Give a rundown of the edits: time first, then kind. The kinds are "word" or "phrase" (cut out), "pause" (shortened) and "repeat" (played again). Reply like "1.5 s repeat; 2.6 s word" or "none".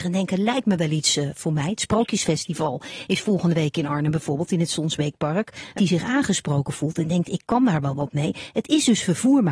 5.8 s word